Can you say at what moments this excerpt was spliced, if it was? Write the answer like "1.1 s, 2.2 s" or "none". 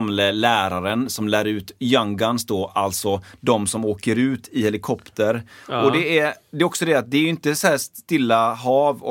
none